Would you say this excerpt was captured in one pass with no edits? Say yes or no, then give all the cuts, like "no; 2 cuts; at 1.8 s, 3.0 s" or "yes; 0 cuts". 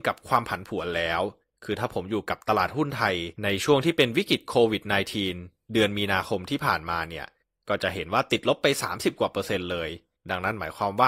no; 4 cuts; at 1.4 s, 3.3 s, 7.4 s, 10.1 s